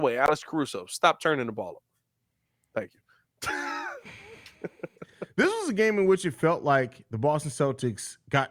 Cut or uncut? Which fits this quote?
uncut